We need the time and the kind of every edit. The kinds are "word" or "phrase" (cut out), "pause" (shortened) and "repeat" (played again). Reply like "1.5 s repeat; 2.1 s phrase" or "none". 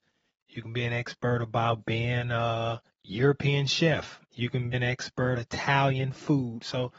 2.9 s pause; 4.2 s pause; 4.7 s word; 5.3 s word